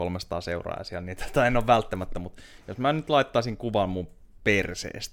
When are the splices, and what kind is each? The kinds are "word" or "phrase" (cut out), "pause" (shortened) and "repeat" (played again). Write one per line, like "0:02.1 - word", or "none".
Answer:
none